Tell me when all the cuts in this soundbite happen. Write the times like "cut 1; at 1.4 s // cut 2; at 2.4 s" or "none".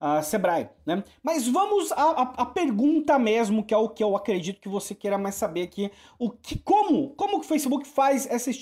none